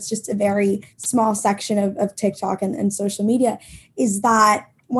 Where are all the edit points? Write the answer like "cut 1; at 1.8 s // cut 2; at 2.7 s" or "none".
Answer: cut 1; at 0.9 s